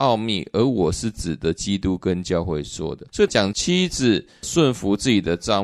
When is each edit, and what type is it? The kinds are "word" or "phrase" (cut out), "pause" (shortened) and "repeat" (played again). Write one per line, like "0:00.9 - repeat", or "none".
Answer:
0:03.1 - pause